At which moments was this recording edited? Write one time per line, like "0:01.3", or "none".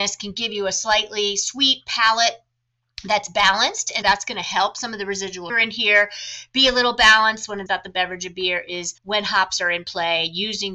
0:04.0
0:05.5
0:07.7
0:09.0